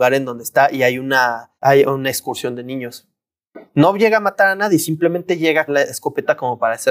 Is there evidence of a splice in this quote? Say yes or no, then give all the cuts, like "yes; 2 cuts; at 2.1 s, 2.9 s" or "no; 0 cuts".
yes; 2 cuts; at 1.6 s, 5.7 s